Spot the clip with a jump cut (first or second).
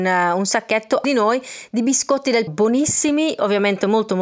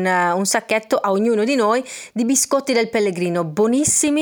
first